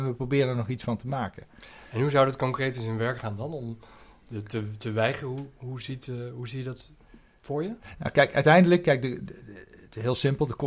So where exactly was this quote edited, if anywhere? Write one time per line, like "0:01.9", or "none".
none